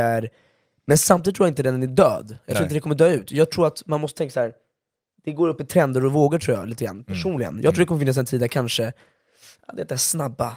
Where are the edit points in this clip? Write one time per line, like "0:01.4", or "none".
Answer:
none